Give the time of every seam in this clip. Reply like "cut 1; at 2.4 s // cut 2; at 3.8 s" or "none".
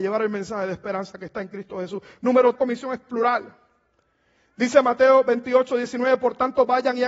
cut 1; at 2.5 s